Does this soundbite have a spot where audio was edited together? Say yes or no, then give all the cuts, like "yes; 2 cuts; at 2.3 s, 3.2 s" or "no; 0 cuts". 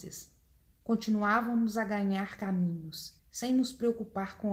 yes; 1 cut; at 3.2 s